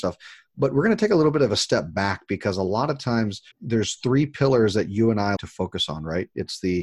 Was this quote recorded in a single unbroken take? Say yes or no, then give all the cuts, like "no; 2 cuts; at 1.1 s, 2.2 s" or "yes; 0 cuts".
no; 2 cuts; at 3.5 s, 5.4 s